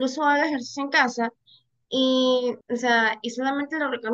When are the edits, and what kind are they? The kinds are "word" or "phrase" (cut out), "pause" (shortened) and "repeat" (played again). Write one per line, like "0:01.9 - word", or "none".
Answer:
0:02.6 - pause